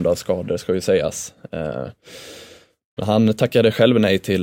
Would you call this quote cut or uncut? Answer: uncut